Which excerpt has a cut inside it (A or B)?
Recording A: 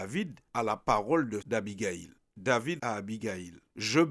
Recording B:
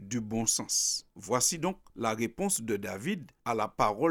A